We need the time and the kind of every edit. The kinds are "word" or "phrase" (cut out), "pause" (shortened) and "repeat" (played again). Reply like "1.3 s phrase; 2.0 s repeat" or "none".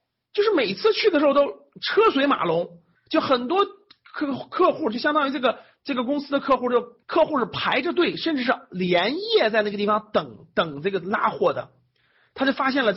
2.9 s pause; 7.0 s pause